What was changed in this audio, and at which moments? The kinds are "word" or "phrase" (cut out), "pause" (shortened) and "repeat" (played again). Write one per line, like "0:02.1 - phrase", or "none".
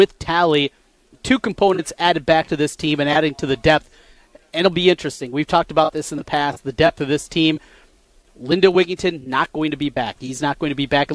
none